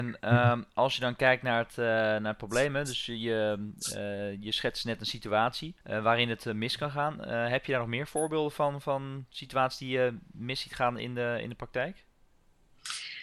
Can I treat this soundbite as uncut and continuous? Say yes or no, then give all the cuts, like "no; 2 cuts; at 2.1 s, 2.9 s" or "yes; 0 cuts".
no; 1 cut; at 5.8 s